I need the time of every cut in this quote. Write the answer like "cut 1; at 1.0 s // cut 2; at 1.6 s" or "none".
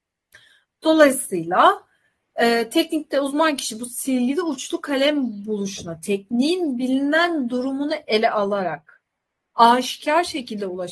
none

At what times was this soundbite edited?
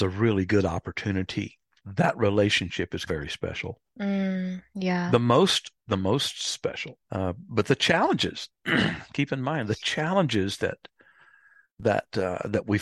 cut 1; at 1.8 s // cut 2; at 3.1 s // cut 3; at 3.9 s // cut 4; at 7.0 s

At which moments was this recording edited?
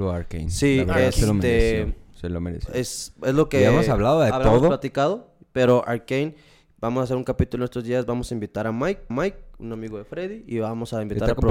cut 1; at 9.1 s

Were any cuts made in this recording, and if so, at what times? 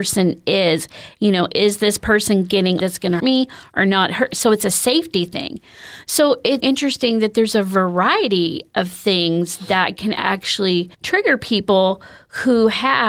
cut 1; at 2.8 s // cut 2; at 3.2 s // cut 3; at 6.6 s // cut 4; at 10.9 s

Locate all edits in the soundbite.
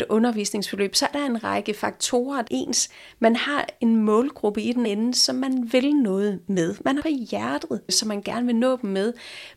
cut 1; at 1.1 s // cut 2; at 2.5 s // cut 3; at 4.8 s // cut 4; at 7.0 s

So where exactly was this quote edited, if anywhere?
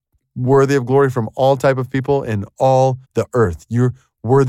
cut 1; at 3.0 s

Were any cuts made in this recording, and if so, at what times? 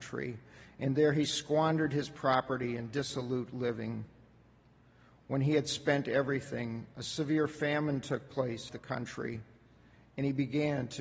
cut 1; at 8.7 s

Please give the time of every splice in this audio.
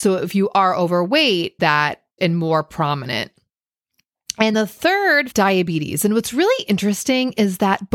cut 1; at 1.6 s // cut 2; at 2.2 s // cut 3; at 4.5 s // cut 4; at 5.3 s

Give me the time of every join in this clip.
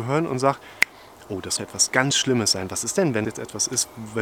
cut 1; at 1.6 s // cut 2; at 3.2 s

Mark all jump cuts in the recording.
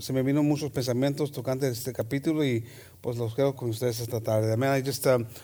cut 1; at 3.5 s

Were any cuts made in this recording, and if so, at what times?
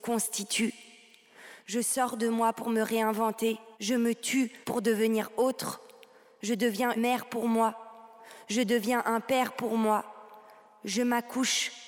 cut 1; at 3.7 s // cut 2; at 4.6 s // cut 3; at 7.0 s

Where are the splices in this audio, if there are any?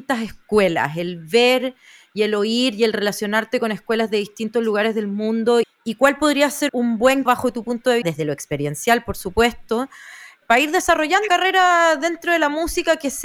cut 1; at 5.6 s // cut 2; at 6.7 s // cut 3; at 7.3 s // cut 4; at 8.0 s // cut 5; at 10.4 s // cut 6; at 11.3 s

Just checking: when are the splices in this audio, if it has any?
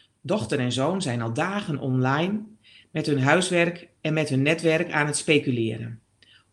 cut 1; at 4.0 s

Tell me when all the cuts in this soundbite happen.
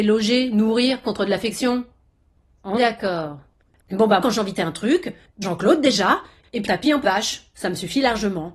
cut 1; at 1.0 s // cut 2; at 2.8 s // cut 3; at 4.2 s // cut 4; at 4.6 s // cut 5; at 5.4 s // cut 6; at 6.7 s // cut 7; at 7.0 s

